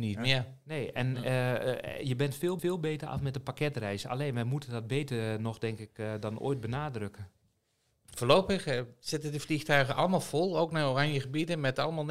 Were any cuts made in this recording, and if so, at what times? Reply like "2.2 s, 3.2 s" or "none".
2.6 s